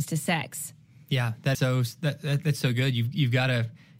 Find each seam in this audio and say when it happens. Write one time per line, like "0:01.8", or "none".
0:01.5